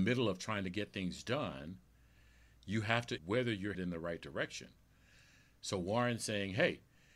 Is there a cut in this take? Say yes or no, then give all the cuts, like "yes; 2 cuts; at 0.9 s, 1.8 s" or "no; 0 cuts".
yes; 2 cuts; at 3.2 s, 3.7 s